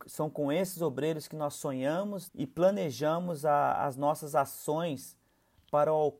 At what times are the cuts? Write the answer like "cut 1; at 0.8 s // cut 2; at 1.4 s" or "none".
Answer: cut 1; at 2.3 s